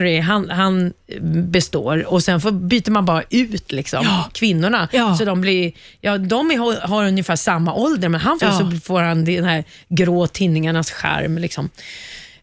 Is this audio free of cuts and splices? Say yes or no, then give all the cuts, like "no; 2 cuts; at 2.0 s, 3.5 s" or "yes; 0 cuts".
no; 1 cut; at 8.4 s